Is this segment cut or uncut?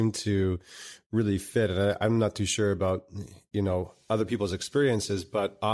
uncut